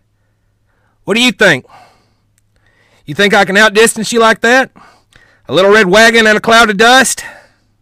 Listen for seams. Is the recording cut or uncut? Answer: uncut